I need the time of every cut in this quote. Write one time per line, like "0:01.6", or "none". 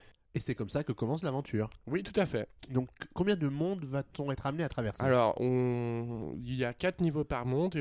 none